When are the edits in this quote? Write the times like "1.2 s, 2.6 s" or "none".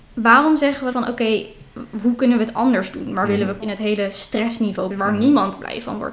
0.9 s, 3.6 s, 4.9 s